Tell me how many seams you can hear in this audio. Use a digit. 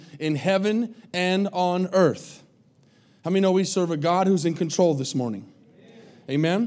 0